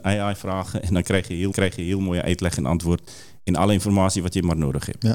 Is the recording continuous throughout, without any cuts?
no; 1 cut; at 1.5 s

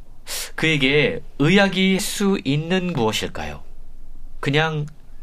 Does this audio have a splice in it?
yes; 2 cuts; at 2.0 s, 2.9 s

